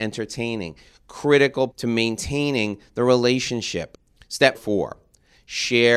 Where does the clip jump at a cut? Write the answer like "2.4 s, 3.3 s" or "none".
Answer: 1.7 s, 4.5 s